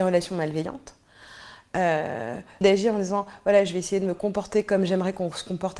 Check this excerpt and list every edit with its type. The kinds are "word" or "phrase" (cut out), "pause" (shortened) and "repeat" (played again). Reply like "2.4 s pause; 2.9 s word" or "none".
2.6 s word